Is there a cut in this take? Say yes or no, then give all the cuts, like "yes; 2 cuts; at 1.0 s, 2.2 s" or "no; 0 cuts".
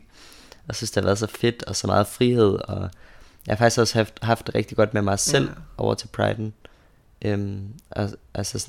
no; 0 cuts